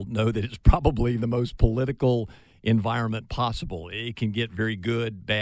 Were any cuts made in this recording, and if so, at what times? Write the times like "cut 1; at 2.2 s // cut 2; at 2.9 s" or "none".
none